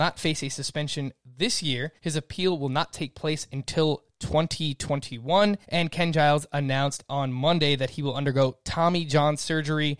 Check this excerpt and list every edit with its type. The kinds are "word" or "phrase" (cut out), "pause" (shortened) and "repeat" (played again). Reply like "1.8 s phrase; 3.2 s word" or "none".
2.0 s pause; 5.6 s pause